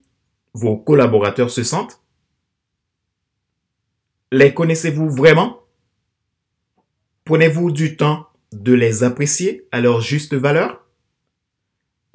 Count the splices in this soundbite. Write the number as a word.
zero